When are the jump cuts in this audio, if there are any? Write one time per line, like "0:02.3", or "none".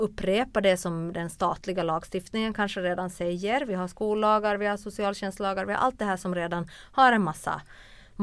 none